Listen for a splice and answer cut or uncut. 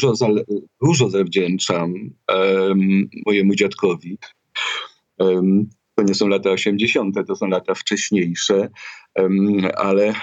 uncut